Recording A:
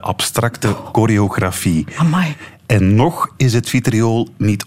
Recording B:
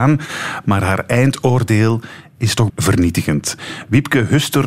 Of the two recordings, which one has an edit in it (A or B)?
B